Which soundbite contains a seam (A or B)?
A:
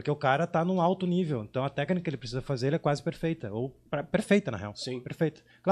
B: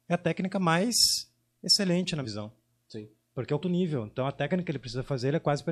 B